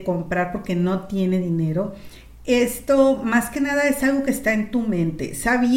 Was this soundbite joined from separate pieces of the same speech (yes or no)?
no